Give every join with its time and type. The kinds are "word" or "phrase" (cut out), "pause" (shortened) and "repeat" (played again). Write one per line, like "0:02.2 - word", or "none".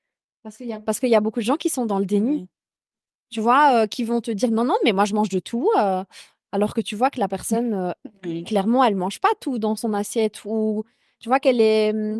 none